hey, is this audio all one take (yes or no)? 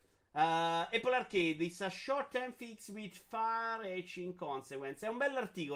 yes